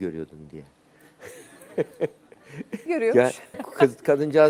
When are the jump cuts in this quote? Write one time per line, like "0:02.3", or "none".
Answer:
0:02.9
0:03.5